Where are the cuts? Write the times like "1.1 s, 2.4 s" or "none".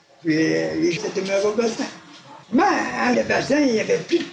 1.0 s, 2.4 s, 3.1 s